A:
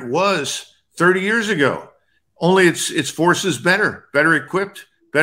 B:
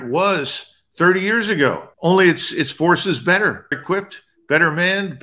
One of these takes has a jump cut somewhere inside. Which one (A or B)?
B